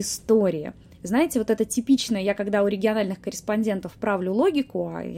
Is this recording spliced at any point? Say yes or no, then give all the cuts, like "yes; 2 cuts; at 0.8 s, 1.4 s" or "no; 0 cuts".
no; 0 cuts